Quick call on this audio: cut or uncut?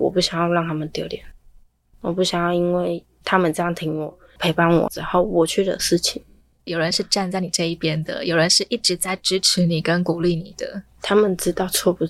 uncut